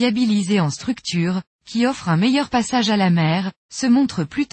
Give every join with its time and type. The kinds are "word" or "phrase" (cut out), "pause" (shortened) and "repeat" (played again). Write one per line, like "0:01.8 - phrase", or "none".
none